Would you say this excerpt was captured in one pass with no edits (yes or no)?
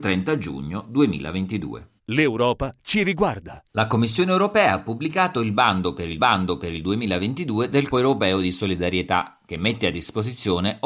no